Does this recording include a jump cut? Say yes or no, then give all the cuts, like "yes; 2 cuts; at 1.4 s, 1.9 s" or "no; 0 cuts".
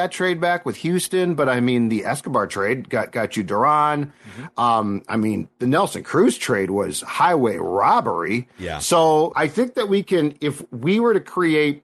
yes; 1 cut; at 9.3 s